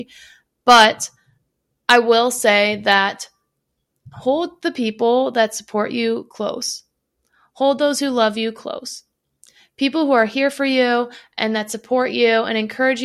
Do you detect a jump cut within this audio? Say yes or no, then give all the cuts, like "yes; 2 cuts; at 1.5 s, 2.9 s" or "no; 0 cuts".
no; 0 cuts